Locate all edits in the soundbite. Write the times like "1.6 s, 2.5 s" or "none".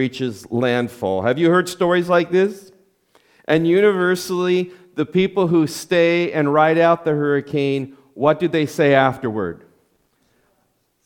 none